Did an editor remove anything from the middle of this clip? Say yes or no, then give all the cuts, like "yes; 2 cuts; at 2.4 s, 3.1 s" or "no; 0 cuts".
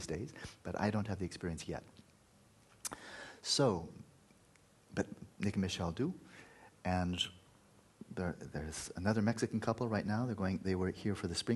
no; 0 cuts